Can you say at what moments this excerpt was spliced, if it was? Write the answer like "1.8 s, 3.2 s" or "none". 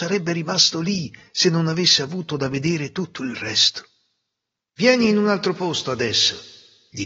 none